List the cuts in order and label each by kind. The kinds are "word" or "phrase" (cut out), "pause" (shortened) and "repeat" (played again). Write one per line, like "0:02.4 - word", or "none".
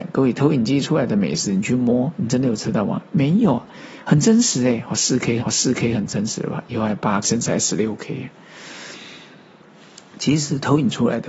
0:05.4 - repeat
0:07.2 - word